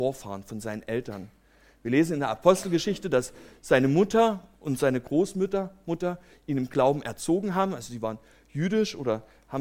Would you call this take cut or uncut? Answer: uncut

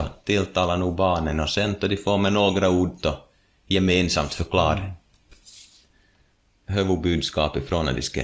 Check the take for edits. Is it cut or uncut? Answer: uncut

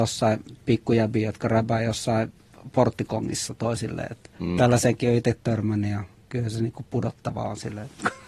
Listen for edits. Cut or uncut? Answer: cut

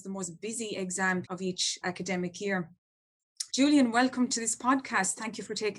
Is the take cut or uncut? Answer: cut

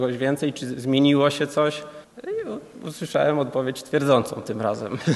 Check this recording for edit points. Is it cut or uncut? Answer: cut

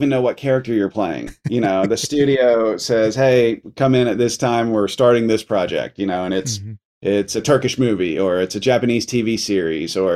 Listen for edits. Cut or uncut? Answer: uncut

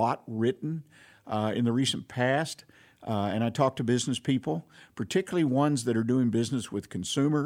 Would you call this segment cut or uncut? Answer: uncut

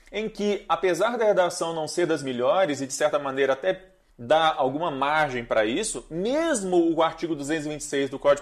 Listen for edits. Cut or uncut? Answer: cut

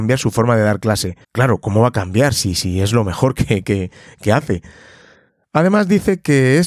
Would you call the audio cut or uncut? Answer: cut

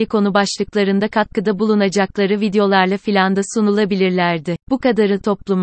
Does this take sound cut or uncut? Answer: cut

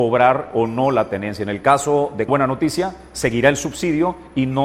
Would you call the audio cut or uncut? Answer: cut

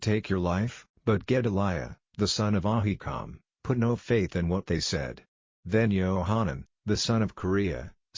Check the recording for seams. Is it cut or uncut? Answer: uncut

